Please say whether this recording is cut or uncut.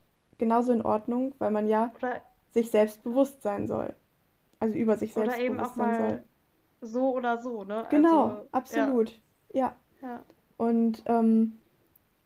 uncut